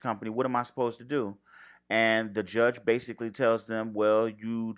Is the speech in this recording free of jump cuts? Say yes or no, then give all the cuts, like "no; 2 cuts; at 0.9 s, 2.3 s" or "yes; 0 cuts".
yes; 0 cuts